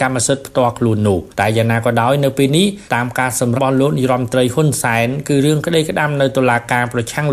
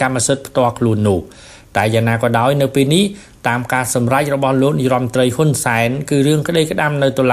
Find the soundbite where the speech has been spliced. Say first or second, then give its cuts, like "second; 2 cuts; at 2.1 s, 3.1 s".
first; 3 cuts; at 1.3 s, 2.9 s, 3.6 s